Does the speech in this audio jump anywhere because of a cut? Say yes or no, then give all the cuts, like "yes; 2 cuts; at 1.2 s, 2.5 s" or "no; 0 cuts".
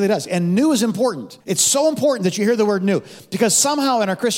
yes; 1 cut; at 1.4 s